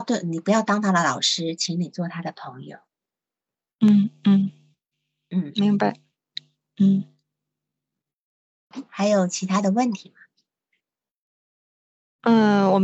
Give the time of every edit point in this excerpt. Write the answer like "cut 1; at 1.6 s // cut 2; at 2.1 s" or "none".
none